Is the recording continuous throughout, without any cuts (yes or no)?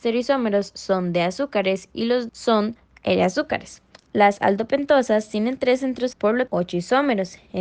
no